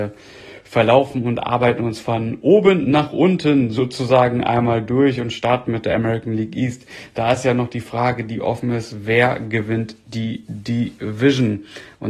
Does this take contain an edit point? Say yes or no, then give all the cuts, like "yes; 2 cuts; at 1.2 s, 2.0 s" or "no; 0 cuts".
no; 0 cuts